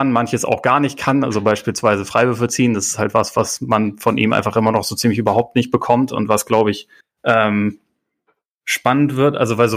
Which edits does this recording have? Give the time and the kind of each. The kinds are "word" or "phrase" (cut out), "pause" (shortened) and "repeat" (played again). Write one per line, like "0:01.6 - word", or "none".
0:07.0 - pause